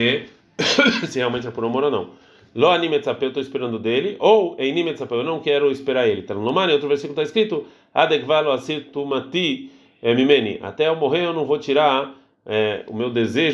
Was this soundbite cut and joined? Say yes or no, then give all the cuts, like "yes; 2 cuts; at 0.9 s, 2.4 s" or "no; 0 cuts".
no; 0 cuts